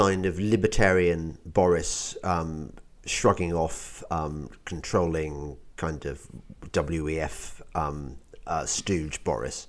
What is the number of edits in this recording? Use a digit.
0